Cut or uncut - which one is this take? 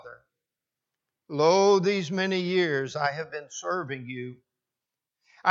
uncut